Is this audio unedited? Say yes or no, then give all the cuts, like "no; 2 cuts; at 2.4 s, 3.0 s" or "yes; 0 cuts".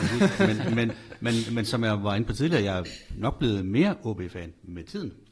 yes; 0 cuts